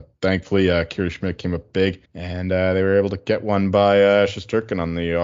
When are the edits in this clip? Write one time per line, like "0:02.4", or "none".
0:02.0